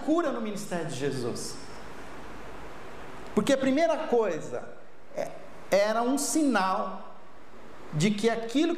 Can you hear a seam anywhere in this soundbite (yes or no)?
no